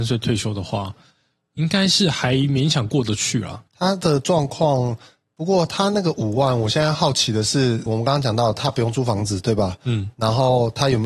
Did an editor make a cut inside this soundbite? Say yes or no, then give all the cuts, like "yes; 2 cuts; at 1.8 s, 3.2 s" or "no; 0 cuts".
yes; 2 cuts; at 3.7 s, 7.9 s